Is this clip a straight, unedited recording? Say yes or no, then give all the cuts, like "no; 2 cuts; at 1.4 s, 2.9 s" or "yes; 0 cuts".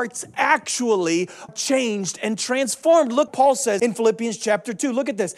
no; 3 cuts; at 1.5 s, 3.3 s, 3.8 s